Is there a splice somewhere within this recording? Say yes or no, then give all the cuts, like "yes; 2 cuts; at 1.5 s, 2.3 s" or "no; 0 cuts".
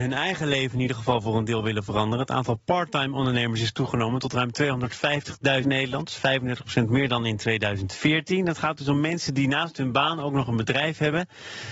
yes; 1 cut; at 5.6 s